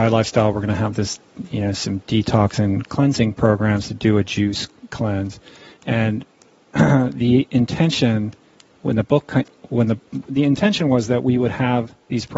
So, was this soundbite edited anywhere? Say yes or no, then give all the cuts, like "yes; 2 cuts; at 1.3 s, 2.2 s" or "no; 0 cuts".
no; 0 cuts